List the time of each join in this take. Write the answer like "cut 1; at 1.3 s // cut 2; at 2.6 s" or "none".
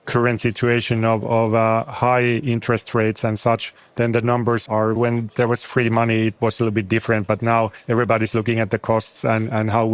cut 1; at 4.7 s // cut 2; at 5.0 s